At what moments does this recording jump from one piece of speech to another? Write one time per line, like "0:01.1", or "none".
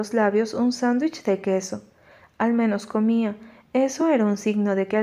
none